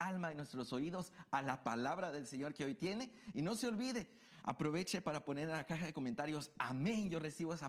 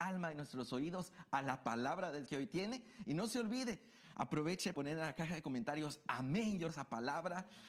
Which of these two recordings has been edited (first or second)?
second